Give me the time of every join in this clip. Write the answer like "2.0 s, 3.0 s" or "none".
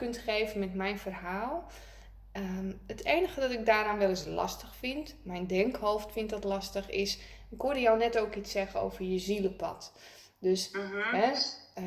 none